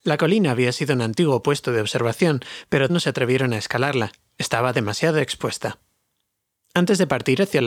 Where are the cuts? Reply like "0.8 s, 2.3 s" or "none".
2.9 s